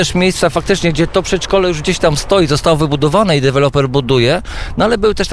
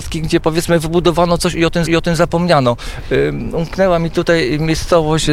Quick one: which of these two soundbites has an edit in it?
second; 1 cut; at 1.9 s

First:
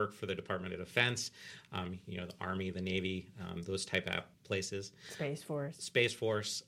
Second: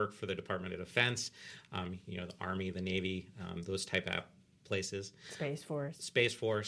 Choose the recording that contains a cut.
first; 1 cut; at 4.3 s

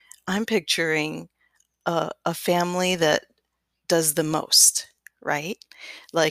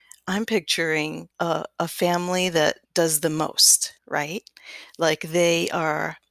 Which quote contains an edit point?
second; 3 cuts; at 1.3 s, 2.8 s, 4.0 s

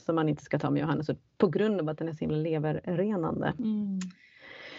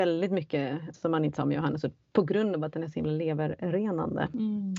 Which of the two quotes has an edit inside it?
second; 2 cuts; at 0.9 s, 1.4 s

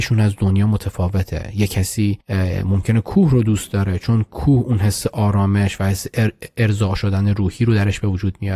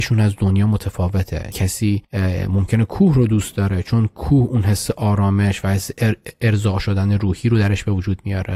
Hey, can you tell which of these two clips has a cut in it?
second; 1 cut; at 1.5 s

